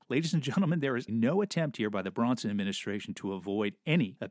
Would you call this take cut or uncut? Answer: cut